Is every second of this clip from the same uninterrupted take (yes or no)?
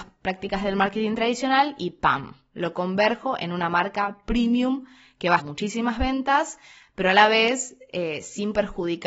no